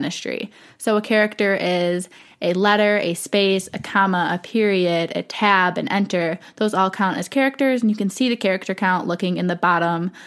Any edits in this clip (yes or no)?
no